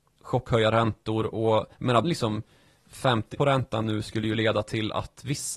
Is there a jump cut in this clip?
yes; 4 cuts; at 1.7 s, 2.0 s, 3.3 s, 3.8 s

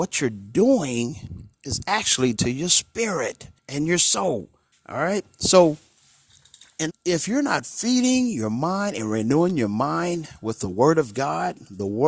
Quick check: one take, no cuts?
no; 5 cuts; at 1.5 s, 2.3 s, 3.6 s, 4.7 s, 6.9 s

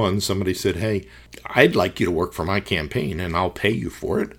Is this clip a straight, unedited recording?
yes; 0 cuts

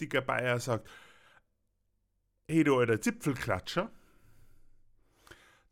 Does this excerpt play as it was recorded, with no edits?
yes; 0 cuts

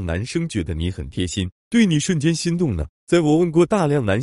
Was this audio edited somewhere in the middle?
yes; 1 cut; at 3.0 s

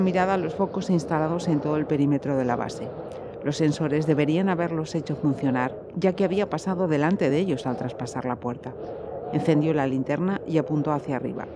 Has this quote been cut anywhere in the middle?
no; 0 cuts

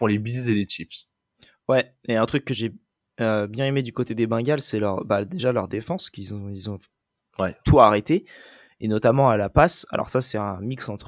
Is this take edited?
no; 0 cuts

